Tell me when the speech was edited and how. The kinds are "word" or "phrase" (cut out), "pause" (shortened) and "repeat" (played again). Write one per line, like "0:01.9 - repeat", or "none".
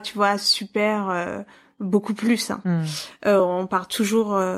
none